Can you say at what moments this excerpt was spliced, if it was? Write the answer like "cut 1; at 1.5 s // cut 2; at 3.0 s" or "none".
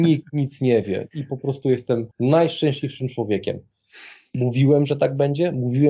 cut 1; at 2.1 s